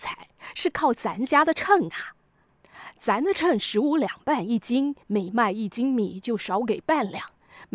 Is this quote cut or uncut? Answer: cut